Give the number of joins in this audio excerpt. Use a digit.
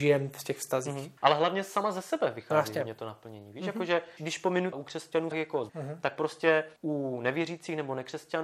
6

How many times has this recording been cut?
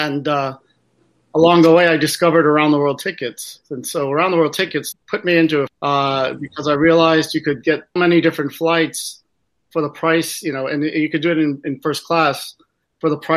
3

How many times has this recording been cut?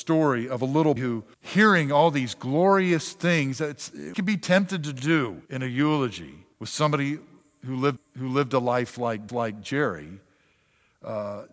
7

